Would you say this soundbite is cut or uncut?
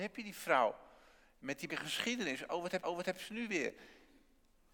cut